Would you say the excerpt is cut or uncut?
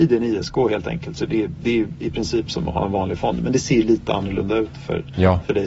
uncut